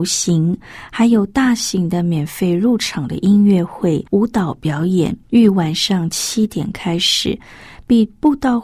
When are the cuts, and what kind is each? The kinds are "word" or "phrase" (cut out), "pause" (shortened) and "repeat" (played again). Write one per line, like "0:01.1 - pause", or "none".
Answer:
0:04.1 - pause
0:05.2 - pause